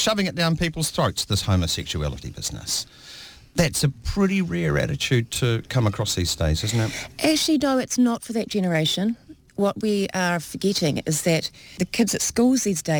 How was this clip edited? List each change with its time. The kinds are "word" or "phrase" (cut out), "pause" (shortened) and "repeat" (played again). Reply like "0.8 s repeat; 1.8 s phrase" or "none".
none